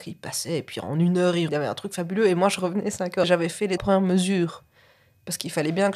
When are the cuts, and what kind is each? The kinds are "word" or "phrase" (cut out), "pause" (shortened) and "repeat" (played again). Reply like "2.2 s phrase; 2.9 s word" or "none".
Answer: 1.5 s word; 3.2 s word; 3.8 s word

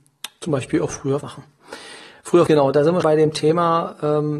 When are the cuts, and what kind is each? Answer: 1.2 s word; 2.5 s word; 3.0 s word

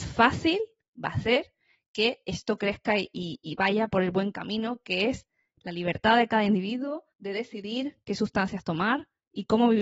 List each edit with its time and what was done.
7.1 s pause

